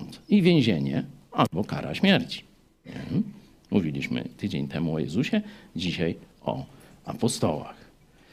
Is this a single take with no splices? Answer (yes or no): yes